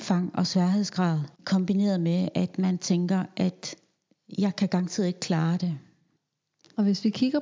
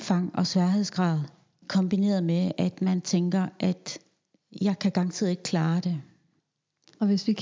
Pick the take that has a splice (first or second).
first